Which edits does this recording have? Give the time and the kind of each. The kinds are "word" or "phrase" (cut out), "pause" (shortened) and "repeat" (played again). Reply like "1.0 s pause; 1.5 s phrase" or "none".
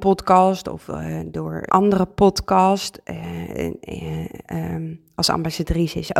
1.7 s word; 4.4 s word